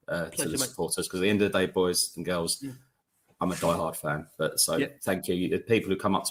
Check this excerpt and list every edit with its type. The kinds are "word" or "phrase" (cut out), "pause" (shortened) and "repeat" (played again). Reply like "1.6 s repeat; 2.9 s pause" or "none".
none